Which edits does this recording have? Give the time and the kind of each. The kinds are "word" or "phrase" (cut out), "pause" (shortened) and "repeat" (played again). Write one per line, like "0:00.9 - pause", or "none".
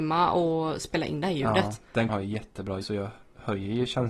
0:02.1 - word
0:02.8 - word